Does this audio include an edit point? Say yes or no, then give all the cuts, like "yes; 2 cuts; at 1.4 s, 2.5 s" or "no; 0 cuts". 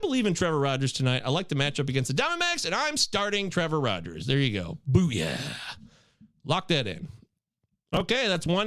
no; 0 cuts